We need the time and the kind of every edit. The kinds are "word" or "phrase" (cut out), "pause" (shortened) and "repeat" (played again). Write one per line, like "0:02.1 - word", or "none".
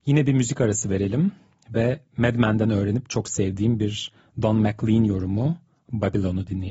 none